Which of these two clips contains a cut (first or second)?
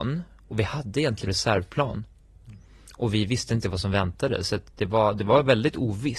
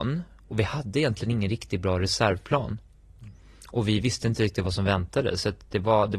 first